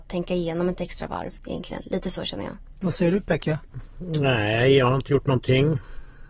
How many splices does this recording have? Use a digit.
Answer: 1